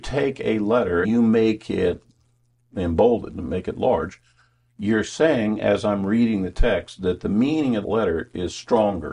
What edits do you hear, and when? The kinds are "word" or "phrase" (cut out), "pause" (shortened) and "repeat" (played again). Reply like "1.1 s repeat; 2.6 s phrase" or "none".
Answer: 1.0 s word; 7.8 s word